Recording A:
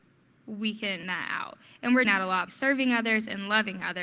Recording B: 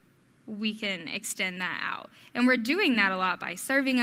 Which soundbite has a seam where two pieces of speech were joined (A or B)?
A